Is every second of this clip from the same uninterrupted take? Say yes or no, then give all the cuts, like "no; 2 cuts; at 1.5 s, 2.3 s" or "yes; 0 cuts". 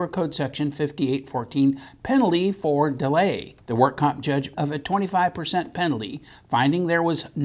no; 2 cuts; at 3.6 s, 4.5 s